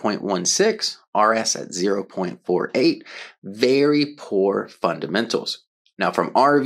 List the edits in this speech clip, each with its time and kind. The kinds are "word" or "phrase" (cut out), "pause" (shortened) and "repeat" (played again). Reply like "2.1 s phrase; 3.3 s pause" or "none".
none